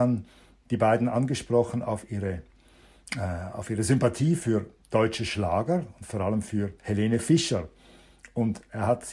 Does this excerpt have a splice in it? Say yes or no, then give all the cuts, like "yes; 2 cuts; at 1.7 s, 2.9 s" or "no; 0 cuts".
no; 0 cuts